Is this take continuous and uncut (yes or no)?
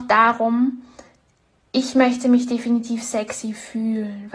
yes